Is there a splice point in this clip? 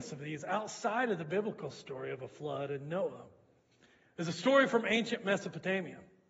no; 0 cuts

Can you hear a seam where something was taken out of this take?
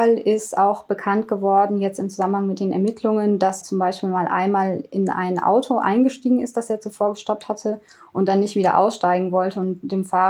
yes; 1 cut; at 3.6 s

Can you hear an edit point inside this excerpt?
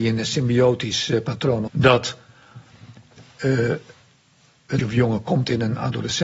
yes; 2 cuts; at 1.7 s, 4.8 s

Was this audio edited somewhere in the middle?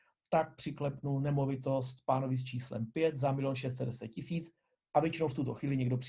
no; 0 cuts

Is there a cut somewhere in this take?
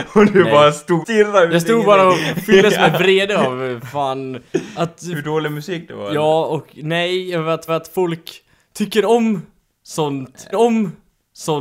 yes; 3 cuts; at 1.0 s, 7.7 s, 10.5 s

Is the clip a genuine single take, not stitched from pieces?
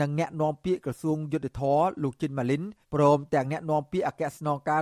no; 1 cut; at 2.8 s

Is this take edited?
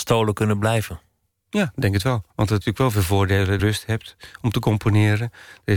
yes; 3 cuts; at 2.3 s, 2.6 s, 3.6 s

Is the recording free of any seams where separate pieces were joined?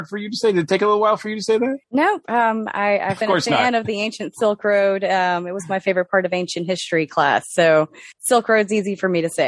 no; 3 cuts; at 1.8 s, 3.2 s, 8.1 s

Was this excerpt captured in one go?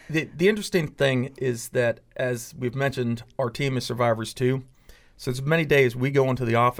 yes; 0 cuts

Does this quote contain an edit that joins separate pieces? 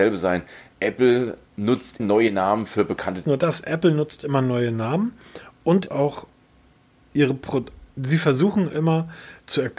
yes; 3 cuts; at 2.0 s, 3.2 s, 5.9 s

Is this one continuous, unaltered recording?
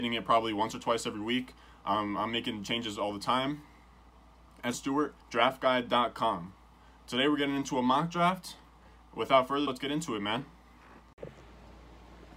no; 3 cuts; at 4.7 s, 5.2 s, 9.7 s

